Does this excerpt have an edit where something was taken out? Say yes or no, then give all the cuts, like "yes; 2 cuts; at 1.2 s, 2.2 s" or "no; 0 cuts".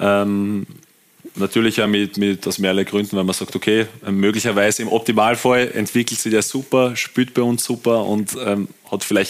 no; 0 cuts